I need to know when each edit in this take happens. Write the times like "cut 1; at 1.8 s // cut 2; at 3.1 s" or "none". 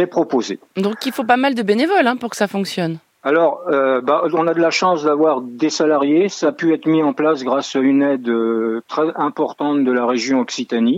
none